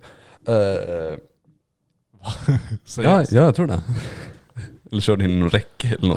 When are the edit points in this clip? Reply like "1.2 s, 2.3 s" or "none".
none

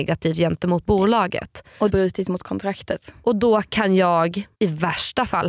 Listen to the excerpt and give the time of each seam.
1.9 s, 4.5 s

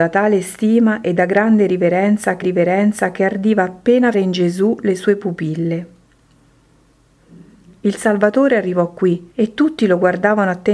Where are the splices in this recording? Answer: 2.4 s, 4.1 s, 9.3 s

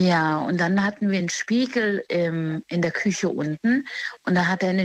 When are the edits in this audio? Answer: none

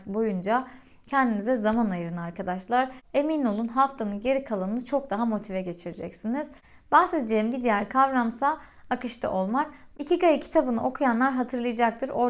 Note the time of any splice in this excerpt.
none

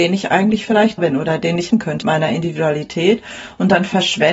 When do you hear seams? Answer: 1.0 s, 1.7 s, 2.0 s

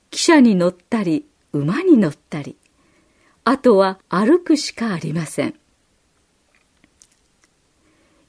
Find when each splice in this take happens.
4.0 s

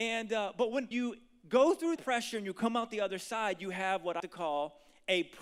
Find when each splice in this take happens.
0.9 s, 2.0 s, 4.2 s

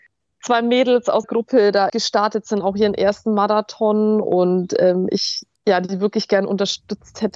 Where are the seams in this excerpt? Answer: 1.2 s, 1.9 s, 5.6 s

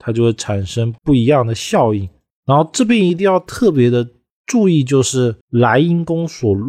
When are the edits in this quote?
1.0 s, 5.4 s

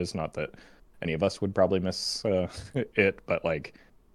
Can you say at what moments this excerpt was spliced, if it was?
none

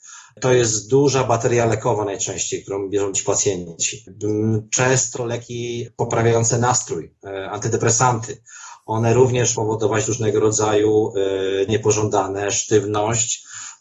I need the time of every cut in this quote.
3.1 s, 5.2 s, 9.6 s, 11.7 s

